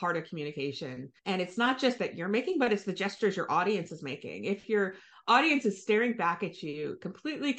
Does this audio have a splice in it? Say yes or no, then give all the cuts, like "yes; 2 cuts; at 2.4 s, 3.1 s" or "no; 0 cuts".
yes; 2 cuts; at 1.2 s, 2.0 s